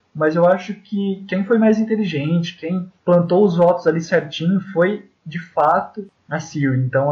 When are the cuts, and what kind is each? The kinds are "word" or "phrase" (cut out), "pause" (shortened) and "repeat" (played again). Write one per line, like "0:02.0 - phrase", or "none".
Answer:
0:03.0 - pause